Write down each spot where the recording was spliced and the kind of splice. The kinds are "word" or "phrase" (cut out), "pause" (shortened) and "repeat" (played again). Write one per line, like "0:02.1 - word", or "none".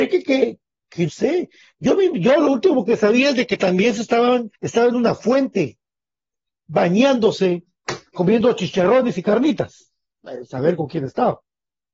0:01.1 - word
0:04.5 - pause
0:08.1 - word

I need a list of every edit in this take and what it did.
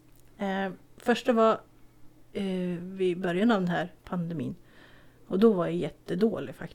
0:04.0 - pause

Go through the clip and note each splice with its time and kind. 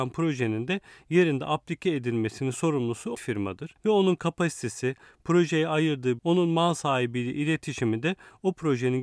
0:03.1 - word
0:06.2 - word

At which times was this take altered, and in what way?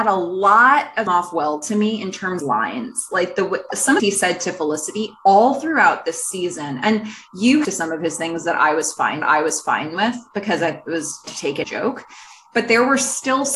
0:01.1 - phrase
0:02.4 - phrase
0:04.0 - phrase
0:07.6 - phrase
0:09.2 - repeat
0:11.3 - word
0:11.6 - phrase

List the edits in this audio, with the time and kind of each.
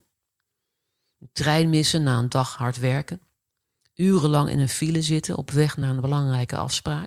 none

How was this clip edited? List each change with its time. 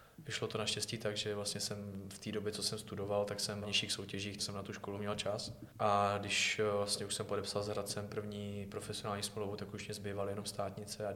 0:03.6 - word
0:04.4 - word
0:05.7 - pause

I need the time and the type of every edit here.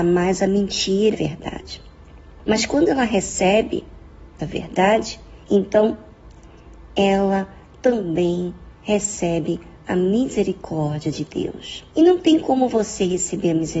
0:01.1 - phrase
0:04.4 - word
0:05.4 - pause
0:08.7 - pause
0:11.9 - pause

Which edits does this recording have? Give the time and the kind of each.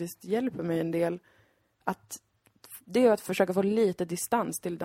none

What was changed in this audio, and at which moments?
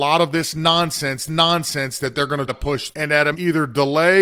0:01.3 - repeat
0:02.5 - word
0:02.9 - word
0:03.3 - word

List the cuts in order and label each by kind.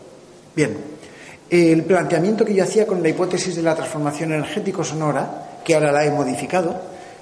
none

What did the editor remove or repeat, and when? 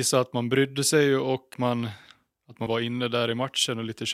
0:01.5 - word
0:02.7 - word

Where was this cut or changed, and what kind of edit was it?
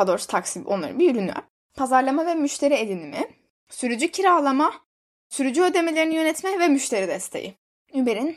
none

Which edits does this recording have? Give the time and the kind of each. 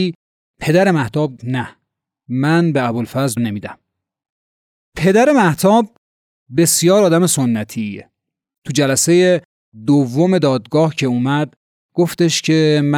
0:01.4 - word
0:03.4 - word

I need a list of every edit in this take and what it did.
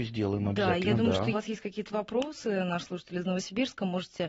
0:01.3 - phrase

